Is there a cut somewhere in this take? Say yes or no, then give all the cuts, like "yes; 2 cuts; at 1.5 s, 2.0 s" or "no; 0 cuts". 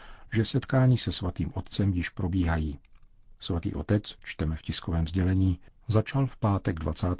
no; 0 cuts